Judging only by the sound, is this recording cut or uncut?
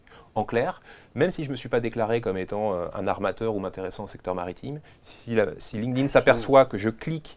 uncut